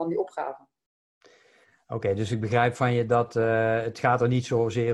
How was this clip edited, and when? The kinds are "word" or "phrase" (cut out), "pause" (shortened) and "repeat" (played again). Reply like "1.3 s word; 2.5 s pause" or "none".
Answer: none